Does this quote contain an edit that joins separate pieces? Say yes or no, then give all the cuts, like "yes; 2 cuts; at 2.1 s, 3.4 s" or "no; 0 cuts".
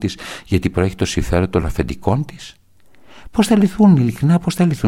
no; 0 cuts